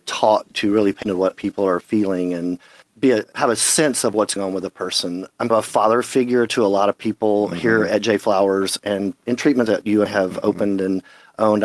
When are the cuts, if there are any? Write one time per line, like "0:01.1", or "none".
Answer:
0:01.0
0:01.3
0:04.4
0:05.5
0:09.7
0:10.1